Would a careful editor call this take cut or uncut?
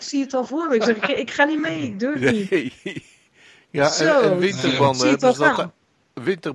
uncut